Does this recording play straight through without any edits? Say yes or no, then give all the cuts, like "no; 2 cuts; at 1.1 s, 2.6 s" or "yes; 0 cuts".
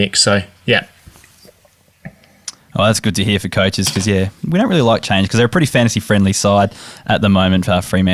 yes; 0 cuts